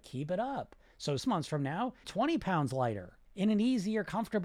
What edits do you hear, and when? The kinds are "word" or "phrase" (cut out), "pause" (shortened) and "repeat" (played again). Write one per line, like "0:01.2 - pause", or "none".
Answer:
0:01.2 - word
0:02.0 - phrase
0:03.2 - pause

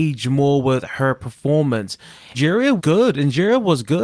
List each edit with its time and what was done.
0:02.3 - word
0:02.8 - word

